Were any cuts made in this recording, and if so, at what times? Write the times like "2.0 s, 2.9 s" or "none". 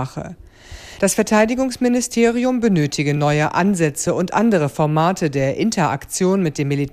none